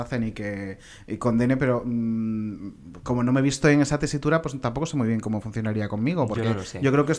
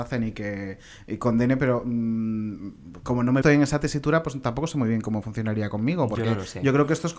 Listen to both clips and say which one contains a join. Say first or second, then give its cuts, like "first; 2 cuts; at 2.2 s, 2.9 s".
second; 1 cut; at 3.4 s